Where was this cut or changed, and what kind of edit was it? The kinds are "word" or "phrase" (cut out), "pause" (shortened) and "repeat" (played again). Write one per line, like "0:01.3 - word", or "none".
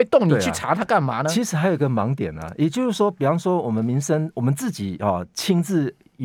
none